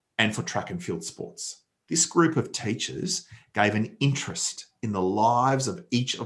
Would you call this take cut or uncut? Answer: uncut